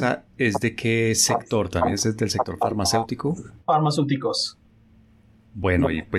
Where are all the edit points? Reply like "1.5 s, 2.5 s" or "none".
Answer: none